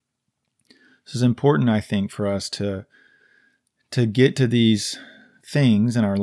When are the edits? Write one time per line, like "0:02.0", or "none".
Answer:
none